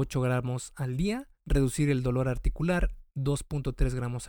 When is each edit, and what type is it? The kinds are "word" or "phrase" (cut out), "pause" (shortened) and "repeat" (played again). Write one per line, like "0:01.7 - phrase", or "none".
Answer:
0:01.3 - pause
0:03.1 - pause